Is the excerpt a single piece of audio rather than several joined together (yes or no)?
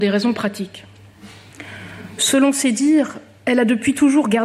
yes